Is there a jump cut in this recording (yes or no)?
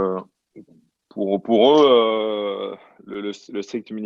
no